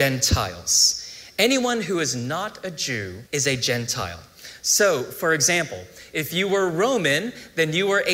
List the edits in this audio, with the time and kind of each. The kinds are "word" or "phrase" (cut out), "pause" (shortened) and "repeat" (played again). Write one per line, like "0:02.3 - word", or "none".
0:03.3 - pause